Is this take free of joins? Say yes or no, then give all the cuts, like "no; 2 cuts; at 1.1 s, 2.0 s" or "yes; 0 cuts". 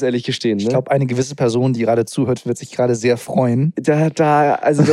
yes; 0 cuts